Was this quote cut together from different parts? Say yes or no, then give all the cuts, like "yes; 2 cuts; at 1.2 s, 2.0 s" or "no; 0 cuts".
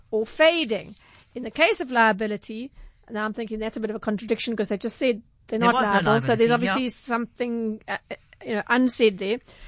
no; 0 cuts